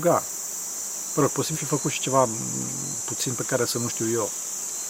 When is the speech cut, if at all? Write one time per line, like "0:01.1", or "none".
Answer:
0:01.5

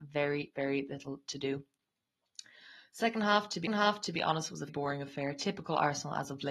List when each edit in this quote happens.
0:03.7
0:04.7

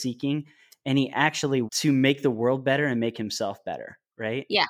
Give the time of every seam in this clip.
0:01.7

